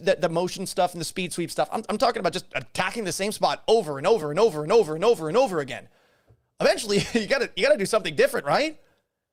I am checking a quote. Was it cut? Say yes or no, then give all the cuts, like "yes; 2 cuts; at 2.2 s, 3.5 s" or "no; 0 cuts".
no; 0 cuts